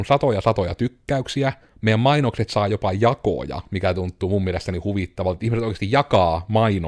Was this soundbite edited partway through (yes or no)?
no